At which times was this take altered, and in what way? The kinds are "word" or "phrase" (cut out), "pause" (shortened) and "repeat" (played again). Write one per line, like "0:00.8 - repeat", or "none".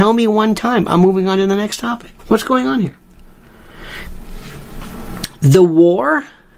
0:02.2 - pause